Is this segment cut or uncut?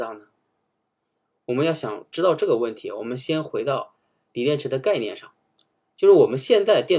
uncut